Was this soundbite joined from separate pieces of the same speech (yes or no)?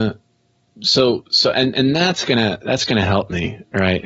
no